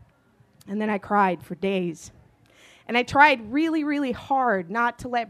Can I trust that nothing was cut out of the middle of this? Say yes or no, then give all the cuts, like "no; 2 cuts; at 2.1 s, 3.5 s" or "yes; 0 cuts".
yes; 0 cuts